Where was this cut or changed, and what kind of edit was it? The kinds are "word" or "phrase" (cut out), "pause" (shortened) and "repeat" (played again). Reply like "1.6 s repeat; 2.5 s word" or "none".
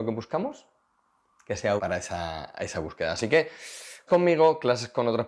1.8 s word; 4.1 s word